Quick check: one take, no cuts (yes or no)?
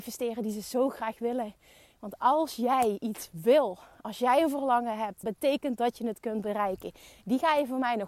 no